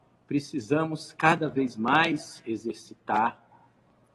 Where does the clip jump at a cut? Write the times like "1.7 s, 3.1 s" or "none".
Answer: none